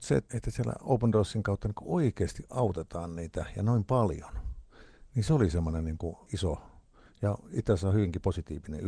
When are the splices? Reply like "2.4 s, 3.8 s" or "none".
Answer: none